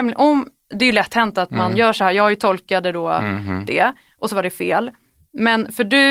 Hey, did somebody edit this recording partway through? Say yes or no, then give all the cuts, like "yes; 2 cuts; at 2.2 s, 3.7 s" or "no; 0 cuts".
no; 0 cuts